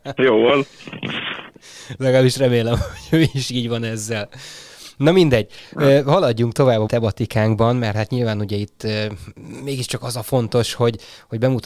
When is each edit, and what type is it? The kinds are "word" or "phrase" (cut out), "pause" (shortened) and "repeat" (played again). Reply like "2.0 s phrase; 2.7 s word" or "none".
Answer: 6.9 s word